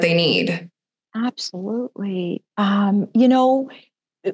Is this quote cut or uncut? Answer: uncut